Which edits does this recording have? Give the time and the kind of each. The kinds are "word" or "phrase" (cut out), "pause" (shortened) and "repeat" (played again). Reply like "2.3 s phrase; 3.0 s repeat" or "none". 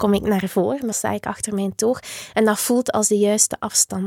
0.9 s word